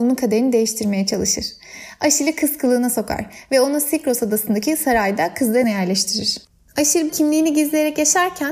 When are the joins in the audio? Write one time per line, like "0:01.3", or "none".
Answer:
0:05.6
0:07.1